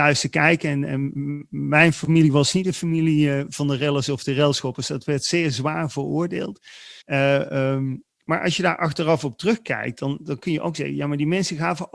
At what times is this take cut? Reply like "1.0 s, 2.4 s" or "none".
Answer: 7.0 s, 8.1 s